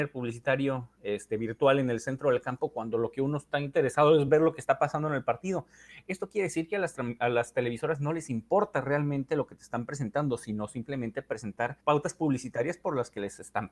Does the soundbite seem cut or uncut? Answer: uncut